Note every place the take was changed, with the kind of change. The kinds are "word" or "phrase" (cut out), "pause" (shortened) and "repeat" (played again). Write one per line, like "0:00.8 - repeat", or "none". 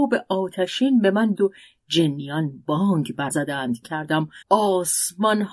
0:01.3 - word
0:03.3 - word
0:03.8 - phrase
0:04.4 - pause